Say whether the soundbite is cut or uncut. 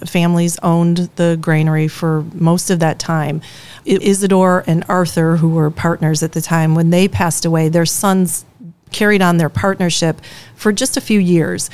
cut